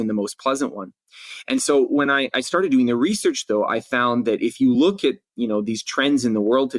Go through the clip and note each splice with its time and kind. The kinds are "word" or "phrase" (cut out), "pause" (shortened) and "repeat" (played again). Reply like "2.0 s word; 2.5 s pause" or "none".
none